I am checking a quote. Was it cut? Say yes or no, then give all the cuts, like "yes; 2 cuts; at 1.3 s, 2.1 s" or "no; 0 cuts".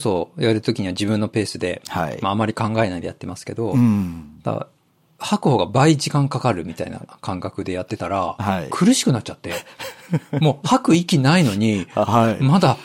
no; 0 cuts